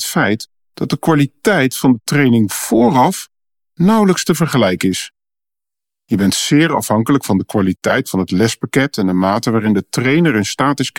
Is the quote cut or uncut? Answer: uncut